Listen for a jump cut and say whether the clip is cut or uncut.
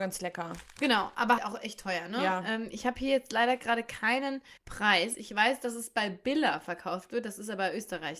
cut